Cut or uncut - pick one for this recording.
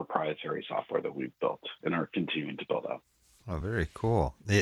uncut